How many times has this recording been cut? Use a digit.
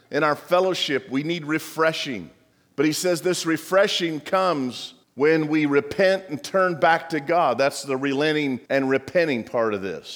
3